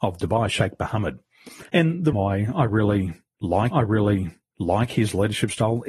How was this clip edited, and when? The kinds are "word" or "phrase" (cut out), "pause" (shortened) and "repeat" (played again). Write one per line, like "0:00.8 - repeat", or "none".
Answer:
0:01.7 - pause
0:02.1 - word
0:03.7 - repeat